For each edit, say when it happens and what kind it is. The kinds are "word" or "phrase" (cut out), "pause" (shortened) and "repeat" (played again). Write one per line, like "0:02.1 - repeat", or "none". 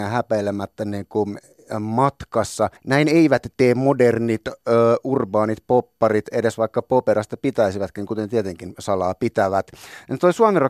0:02.8 - pause